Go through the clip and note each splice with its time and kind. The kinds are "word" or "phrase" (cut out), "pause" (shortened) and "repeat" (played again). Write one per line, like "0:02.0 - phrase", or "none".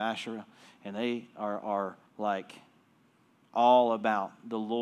0:02.1 - pause

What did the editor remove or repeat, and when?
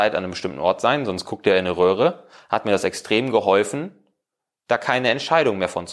none

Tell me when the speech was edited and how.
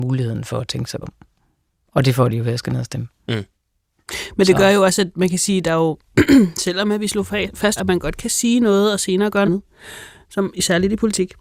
0:01.0 - word
0:07.8 - word
0:09.5 - word

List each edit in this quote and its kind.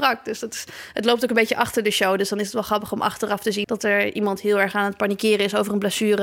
0:03.6 - word

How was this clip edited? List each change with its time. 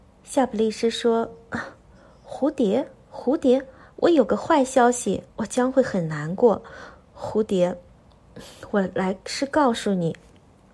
0:05.3 - pause

